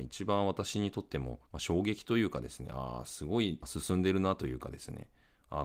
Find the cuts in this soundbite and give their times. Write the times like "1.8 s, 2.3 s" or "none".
1.5 s